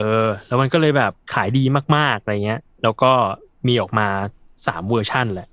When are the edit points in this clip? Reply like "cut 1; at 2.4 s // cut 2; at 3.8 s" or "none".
cut 1; at 1.2 s